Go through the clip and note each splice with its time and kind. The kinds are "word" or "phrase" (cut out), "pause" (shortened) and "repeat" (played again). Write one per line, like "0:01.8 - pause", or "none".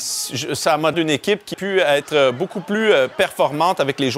0:00.9 - word
0:01.5 - word